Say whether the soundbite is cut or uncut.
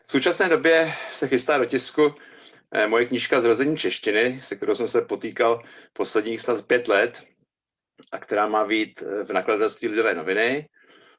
uncut